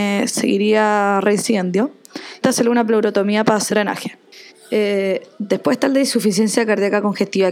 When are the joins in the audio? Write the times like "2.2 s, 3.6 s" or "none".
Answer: 2.4 s, 3.7 s, 4.5 s